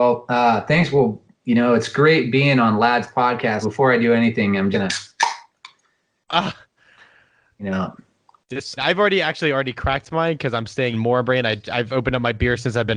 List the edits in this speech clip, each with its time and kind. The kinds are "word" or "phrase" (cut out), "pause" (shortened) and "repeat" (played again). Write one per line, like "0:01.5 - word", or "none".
0:03.6 - word
0:04.7 - word
0:08.8 - phrase
0:10.9 - word

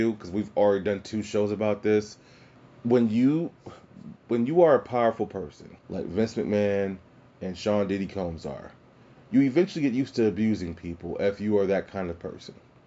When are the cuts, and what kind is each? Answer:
0:05.8 - pause

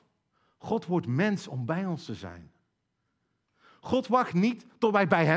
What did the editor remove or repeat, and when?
none

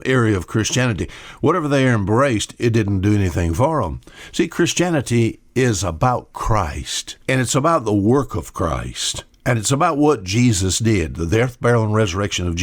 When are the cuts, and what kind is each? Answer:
0:07.2 - pause
0:09.3 - pause

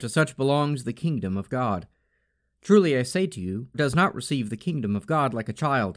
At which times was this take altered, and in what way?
0:03.7 - word

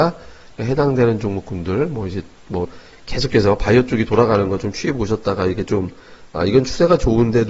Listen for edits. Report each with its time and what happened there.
0:02.6 - phrase

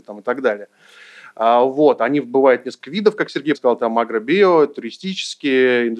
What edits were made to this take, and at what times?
0:03.5 - word

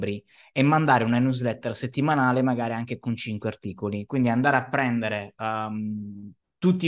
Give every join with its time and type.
none

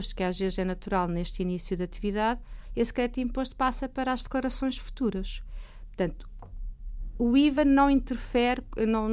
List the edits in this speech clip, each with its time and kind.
none

